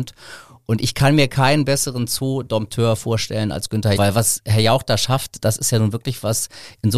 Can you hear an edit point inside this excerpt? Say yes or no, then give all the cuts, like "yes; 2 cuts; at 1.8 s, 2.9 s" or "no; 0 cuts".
yes; 1 cut; at 4.0 s